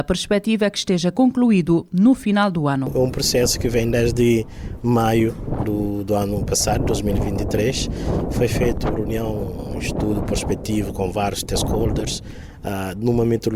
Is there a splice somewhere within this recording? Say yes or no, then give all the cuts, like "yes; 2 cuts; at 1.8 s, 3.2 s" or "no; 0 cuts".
no; 0 cuts